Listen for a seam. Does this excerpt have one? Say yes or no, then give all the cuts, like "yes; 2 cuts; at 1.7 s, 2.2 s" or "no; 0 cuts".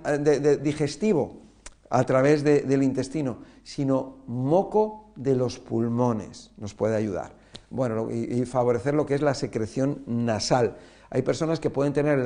no; 0 cuts